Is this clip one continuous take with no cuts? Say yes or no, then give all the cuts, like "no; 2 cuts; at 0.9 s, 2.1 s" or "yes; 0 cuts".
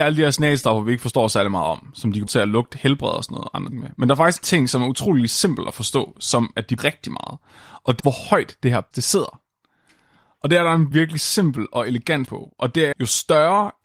no; 9 cuts; at 2.3 s, 3.7 s, 4.4 s, 6.8 s, 8.0 s, 8.9 s, 10.9 s, 12.3 s, 12.9 s